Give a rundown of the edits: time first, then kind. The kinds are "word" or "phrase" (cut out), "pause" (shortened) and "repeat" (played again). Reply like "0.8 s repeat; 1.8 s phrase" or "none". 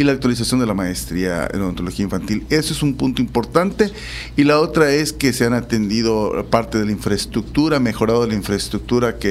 none